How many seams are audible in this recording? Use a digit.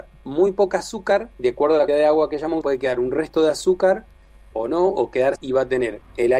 5